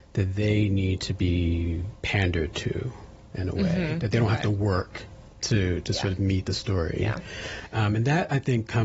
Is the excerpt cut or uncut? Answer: uncut